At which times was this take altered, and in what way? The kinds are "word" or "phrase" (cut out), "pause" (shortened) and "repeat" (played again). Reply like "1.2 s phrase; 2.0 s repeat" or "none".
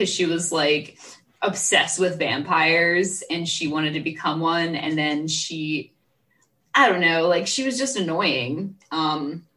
none